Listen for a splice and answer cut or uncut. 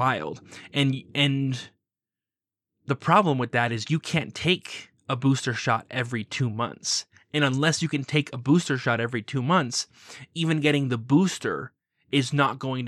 uncut